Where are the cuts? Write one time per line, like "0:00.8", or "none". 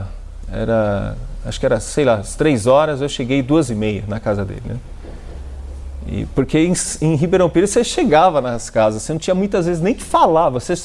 none